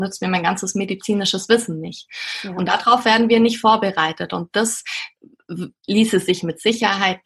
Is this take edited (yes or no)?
no